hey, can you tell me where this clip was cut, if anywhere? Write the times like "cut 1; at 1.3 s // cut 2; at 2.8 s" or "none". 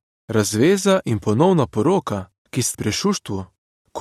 cut 1; at 2.7 s